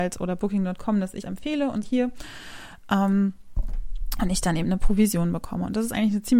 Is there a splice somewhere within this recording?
yes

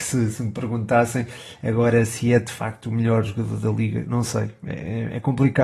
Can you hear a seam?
no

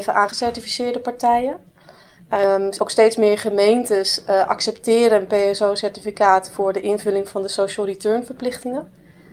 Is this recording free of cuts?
yes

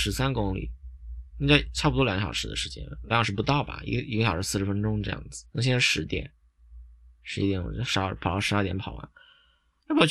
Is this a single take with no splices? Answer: no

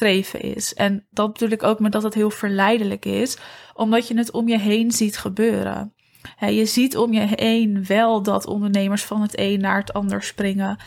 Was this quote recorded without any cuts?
yes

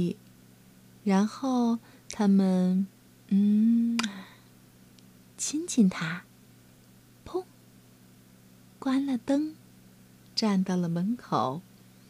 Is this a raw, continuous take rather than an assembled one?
yes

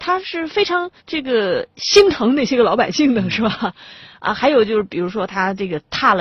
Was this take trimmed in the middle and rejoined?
yes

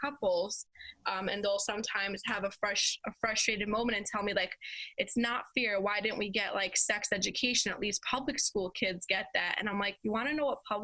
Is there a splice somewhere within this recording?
no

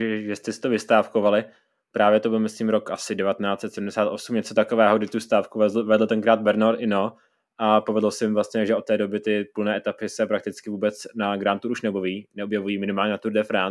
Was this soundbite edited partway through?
no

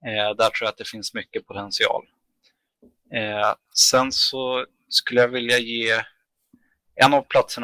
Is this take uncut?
yes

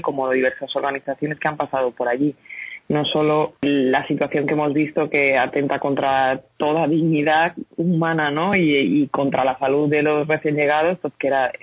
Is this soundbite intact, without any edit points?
no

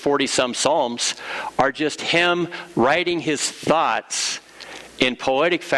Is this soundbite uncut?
yes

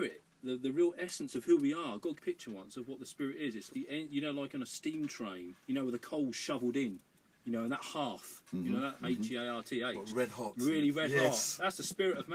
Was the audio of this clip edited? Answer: yes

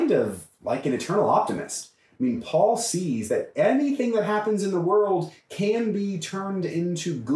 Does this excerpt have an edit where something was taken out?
no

